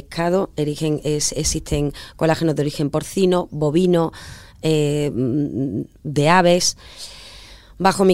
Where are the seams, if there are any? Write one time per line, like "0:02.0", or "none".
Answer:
none